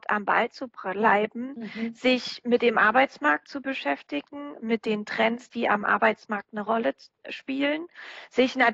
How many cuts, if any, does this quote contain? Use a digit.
0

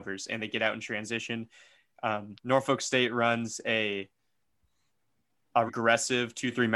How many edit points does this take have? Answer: 2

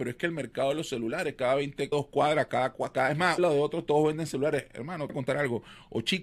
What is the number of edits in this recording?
3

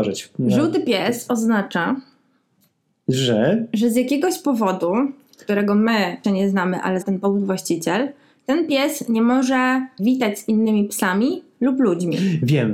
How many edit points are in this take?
3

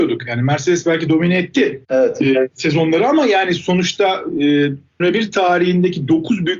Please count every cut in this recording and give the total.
2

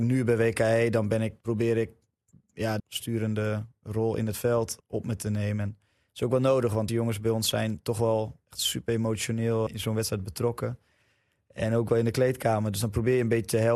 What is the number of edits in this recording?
5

